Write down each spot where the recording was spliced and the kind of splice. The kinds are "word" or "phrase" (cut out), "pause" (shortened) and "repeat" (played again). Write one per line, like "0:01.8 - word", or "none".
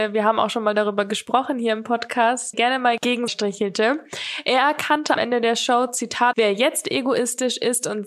0:02.5 - word
0:03.3 - phrase
0:05.2 - phrase
0:06.3 - phrase